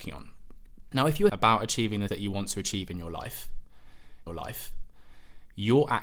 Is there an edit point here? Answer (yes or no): yes